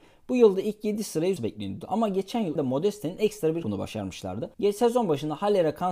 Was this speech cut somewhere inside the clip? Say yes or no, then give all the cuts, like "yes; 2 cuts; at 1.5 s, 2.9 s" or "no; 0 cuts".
yes; 4 cuts; at 1.4 s, 2.6 s, 3.6 s, 4.5 s